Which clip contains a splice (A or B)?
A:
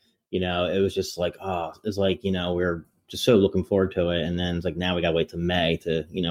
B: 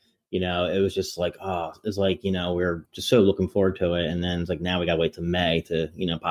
B